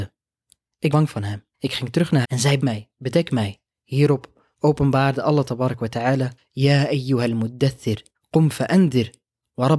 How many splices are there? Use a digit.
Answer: 7